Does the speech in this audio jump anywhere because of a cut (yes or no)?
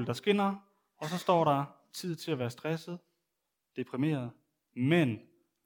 no